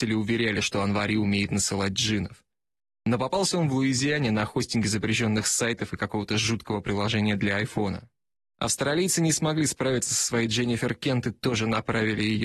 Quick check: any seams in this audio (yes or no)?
no